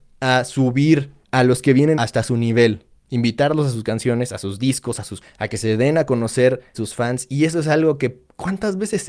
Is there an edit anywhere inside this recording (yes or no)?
yes